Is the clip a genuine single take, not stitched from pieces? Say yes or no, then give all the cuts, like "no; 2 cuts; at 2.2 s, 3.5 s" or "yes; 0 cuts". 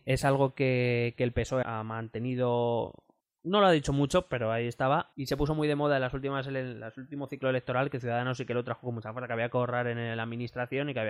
no; 3 cuts; at 1.6 s, 3.2 s, 5.1 s